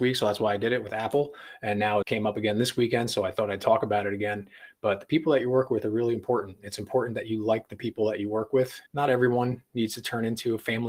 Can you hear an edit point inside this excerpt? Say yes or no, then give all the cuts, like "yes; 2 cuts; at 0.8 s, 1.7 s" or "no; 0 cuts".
yes; 2 cuts; at 2.0 s, 8.9 s